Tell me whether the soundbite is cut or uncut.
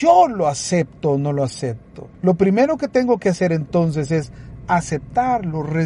cut